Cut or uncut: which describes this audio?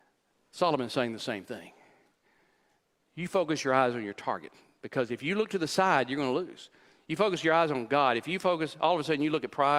uncut